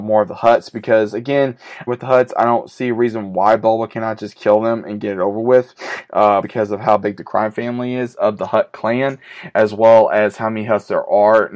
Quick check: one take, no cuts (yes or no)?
no